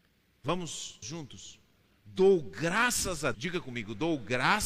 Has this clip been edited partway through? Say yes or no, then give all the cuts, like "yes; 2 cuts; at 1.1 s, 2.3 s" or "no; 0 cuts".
yes; 2 cuts; at 1.0 s, 3.3 s